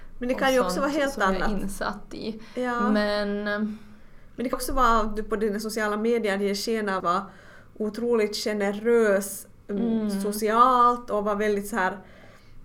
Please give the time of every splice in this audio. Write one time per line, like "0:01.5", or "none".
0:04.5
0:07.0